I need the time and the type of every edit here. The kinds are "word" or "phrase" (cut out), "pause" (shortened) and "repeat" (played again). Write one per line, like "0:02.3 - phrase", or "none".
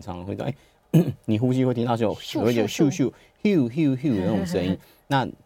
none

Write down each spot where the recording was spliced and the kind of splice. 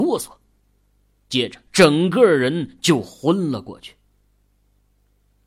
0:01.7 - pause

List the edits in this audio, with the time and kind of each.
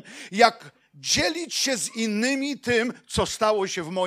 none

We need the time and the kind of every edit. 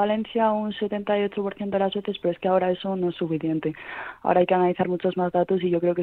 none

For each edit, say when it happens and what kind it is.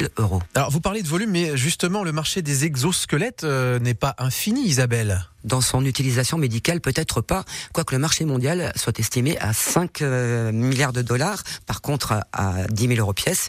none

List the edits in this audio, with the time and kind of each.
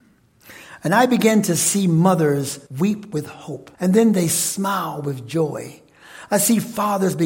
0:02.7 - pause
0:03.7 - pause

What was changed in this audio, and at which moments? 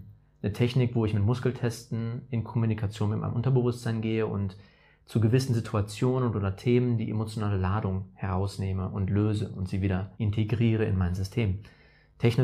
0:10.1 - pause

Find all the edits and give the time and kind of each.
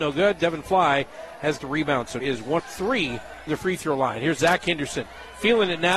0:01.6 - word
0:02.2 - word
0:02.6 - word
0:03.5 - word

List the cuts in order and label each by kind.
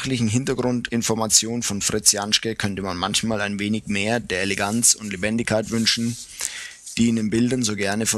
none

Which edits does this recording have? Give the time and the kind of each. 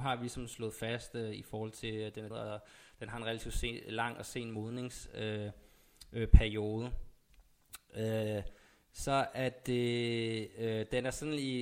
0:02.3 - word

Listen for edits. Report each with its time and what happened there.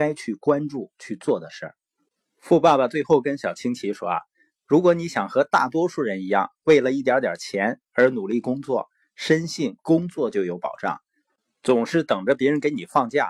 none

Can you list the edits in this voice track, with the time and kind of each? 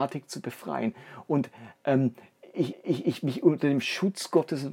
0:02.7 - repeat

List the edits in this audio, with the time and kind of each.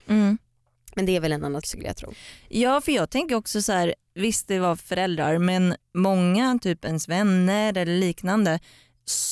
0:01.6 - word

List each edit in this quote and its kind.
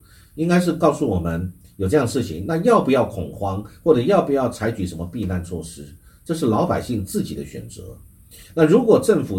none

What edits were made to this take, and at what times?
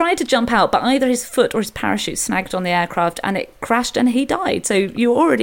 none

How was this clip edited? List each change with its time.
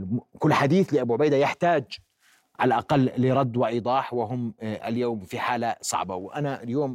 none

